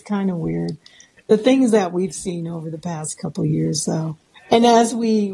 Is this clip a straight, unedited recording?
no; 1 cut; at 4.3 s

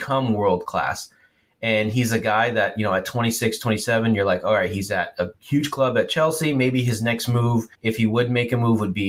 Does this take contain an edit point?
yes; 2 cuts; at 5.3 s, 7.7 s

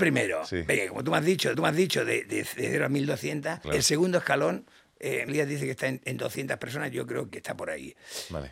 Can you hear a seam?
yes; 4 cuts; at 1.5 s, 3.6 s, 5.3 s, 7.3 s

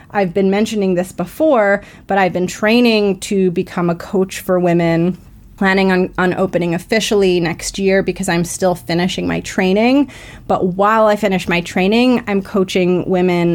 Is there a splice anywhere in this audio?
no; 0 cuts

